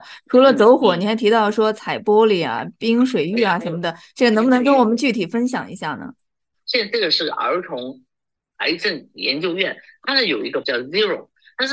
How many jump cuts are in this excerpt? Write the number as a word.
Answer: one